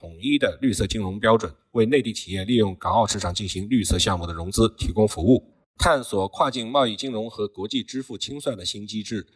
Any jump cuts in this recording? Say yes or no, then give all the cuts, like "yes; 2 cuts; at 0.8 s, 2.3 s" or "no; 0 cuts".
no; 0 cuts